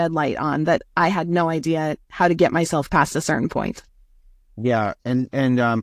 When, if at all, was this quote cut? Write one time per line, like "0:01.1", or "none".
none